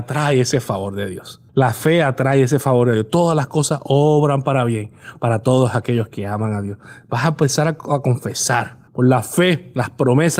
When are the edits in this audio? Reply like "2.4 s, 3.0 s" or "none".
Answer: 1.5 s, 8.9 s